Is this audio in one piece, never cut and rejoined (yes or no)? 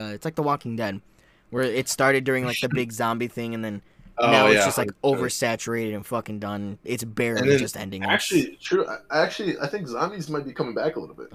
yes